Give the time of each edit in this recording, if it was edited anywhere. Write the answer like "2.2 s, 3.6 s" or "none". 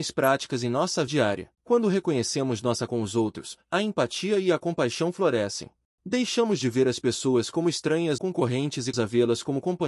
1.1 s, 1.5 s, 2.9 s, 5.9 s, 8.2 s, 8.9 s